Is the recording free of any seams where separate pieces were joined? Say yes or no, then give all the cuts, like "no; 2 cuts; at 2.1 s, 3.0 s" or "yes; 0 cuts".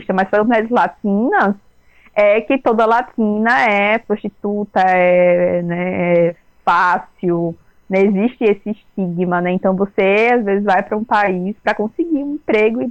yes; 0 cuts